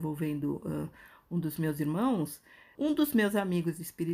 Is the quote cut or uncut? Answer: uncut